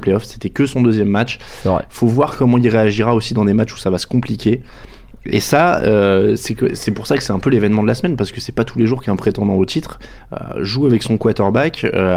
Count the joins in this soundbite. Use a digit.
0